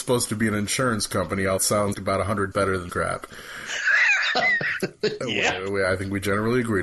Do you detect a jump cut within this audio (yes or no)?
yes